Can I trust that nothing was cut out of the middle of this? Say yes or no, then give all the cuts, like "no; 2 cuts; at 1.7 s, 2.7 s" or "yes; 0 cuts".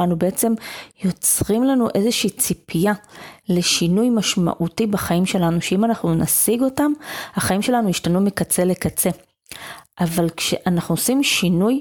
yes; 0 cuts